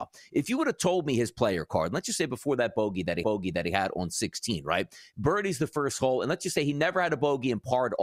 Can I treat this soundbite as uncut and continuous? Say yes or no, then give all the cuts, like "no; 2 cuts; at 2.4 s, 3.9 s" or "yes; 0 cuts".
no; 1 cut; at 3.2 s